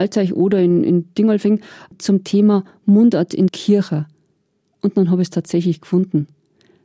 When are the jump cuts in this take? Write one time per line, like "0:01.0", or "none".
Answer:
0:03.5